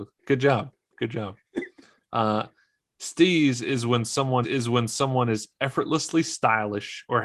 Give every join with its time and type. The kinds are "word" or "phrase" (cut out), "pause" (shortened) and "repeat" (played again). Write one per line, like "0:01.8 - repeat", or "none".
0:04.4 - repeat